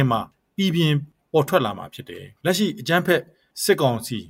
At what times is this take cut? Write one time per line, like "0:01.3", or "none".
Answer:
0:02.4